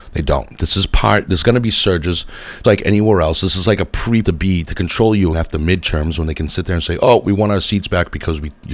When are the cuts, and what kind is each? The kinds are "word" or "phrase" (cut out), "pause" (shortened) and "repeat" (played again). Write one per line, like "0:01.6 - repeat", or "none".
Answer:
0:02.6 - word
0:04.2 - word
0:05.3 - word